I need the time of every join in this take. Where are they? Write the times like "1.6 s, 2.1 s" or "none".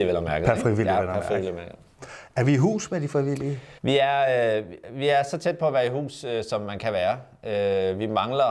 3.8 s